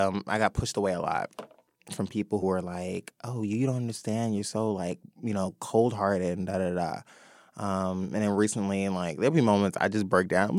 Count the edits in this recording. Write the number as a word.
one